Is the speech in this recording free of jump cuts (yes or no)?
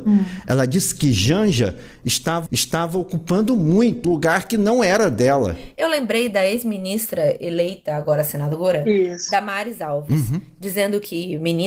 no